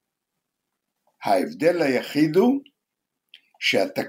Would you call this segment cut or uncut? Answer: uncut